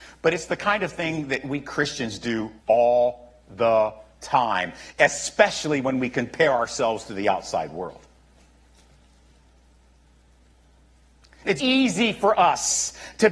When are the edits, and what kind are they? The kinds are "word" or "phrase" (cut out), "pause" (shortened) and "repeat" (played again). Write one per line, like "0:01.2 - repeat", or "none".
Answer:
0:02.6 - pause
0:11.6 - word